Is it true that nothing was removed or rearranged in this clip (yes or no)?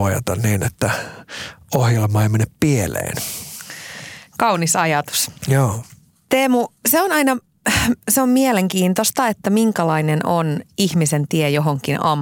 no